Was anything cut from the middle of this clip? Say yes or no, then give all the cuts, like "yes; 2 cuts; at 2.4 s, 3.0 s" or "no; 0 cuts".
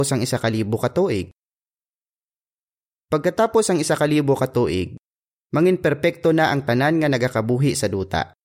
no; 0 cuts